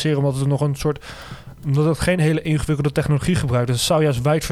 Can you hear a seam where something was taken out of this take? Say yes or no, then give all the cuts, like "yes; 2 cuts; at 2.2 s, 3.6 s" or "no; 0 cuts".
no; 0 cuts